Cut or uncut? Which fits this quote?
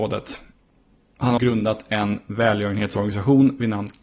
cut